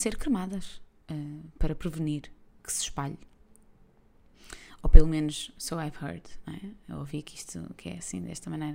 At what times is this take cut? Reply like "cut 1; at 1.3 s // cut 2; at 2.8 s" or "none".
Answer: cut 1; at 2.6 s